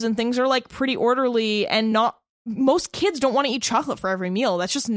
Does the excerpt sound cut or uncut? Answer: uncut